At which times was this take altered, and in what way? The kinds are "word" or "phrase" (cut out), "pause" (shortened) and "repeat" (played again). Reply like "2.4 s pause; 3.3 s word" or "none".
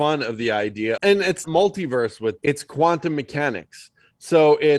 1.0 s word; 1.4 s word; 2.4 s word